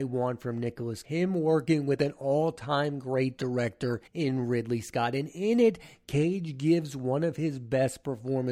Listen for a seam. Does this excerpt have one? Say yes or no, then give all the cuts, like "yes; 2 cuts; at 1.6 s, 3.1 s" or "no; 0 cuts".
yes; 2 cuts; at 1.0 s, 4.1 s